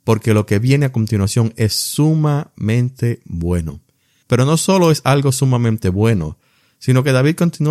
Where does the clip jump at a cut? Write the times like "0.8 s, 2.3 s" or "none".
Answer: none